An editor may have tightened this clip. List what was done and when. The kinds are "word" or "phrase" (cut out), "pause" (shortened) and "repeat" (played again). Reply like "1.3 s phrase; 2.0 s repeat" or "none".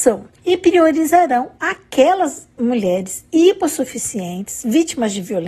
none